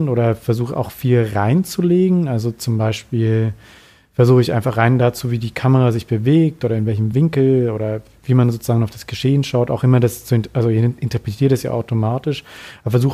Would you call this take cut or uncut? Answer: uncut